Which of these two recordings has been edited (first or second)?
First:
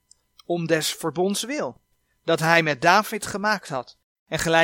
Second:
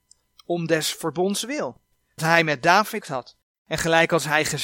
second